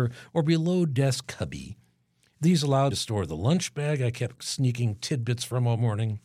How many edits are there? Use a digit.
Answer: 2